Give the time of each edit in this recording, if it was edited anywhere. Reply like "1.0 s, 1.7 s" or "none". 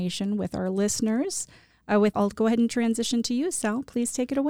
2.1 s